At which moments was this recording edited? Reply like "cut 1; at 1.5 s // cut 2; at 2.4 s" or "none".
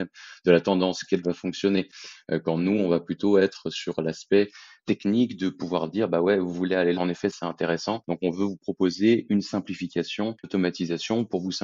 cut 1; at 1.2 s // cut 2; at 4.8 s // cut 3; at 6.9 s // cut 4; at 10.4 s